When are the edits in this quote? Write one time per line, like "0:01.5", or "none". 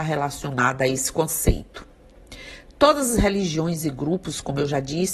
none